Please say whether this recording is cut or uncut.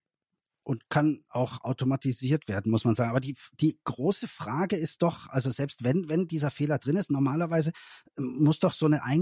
uncut